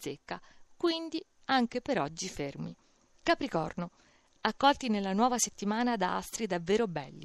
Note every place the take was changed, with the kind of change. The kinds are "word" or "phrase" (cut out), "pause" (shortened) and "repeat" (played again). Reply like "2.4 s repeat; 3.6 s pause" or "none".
none